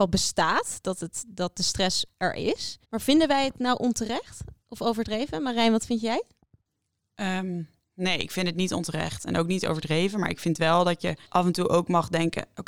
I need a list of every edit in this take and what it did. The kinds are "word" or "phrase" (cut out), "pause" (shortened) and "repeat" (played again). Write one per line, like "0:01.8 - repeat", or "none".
0:02.8 - pause
0:11.2 - pause